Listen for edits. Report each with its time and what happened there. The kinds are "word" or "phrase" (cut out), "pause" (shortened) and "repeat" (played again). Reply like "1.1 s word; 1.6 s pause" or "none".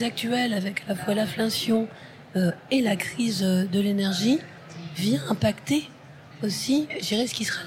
none

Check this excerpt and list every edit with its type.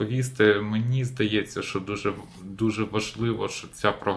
none

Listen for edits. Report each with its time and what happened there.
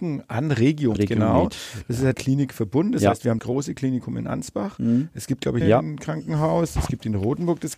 0.9 s word; 2.1 s word; 3.4 s word; 5.6 s phrase

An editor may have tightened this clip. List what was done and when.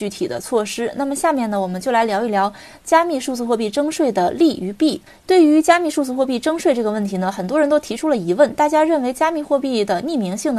5.1 s pause

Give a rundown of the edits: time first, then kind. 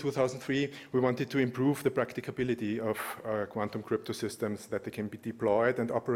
none

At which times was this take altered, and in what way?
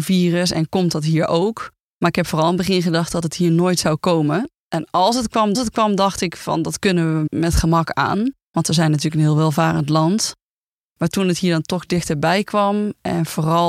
4.6 s pause; 5.5 s repeat; 7.3 s word

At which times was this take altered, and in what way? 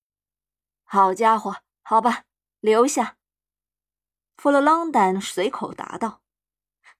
none

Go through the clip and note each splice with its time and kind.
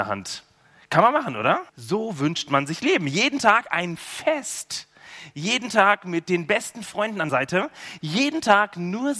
1.7 s pause; 7.3 s word

